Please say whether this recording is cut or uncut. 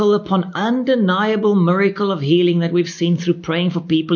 uncut